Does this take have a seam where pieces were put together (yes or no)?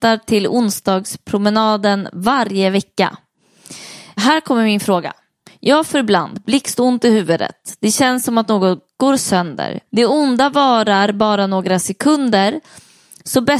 no